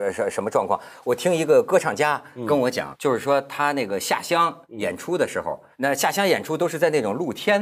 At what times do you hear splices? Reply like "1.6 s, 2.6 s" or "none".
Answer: 2.9 s, 4.6 s, 5.7 s